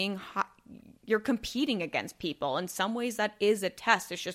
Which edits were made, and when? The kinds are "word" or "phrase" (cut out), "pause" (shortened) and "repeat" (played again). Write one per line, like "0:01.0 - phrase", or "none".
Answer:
0:01.0 - pause